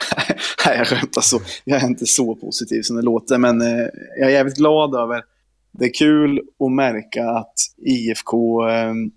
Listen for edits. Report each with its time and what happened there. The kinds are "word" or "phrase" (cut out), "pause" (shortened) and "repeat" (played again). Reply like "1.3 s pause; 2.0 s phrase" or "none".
7.7 s pause